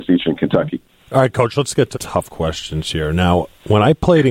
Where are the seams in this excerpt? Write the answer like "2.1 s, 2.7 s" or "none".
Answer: 1.0 s, 1.9 s